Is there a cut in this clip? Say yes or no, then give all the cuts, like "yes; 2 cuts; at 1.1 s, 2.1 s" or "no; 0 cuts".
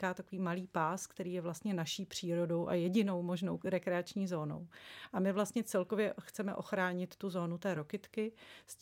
no; 0 cuts